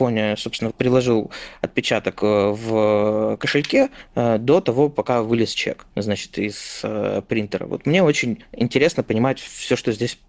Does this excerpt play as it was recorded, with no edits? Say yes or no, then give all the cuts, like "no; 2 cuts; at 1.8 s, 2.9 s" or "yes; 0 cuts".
no; 1 cut; at 5.9 s